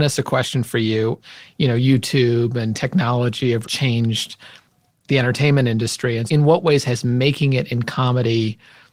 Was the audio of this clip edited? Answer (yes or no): yes